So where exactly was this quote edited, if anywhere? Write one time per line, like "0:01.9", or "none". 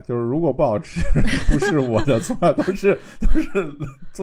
none